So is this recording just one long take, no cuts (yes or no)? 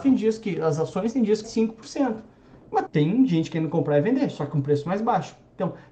no